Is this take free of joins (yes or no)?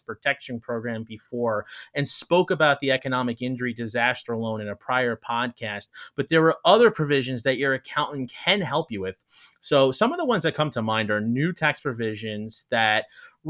yes